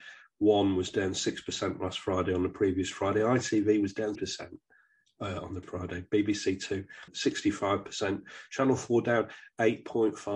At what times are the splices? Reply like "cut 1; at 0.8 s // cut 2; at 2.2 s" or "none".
cut 1; at 4.1 s // cut 2; at 5.6 s // cut 3; at 7.1 s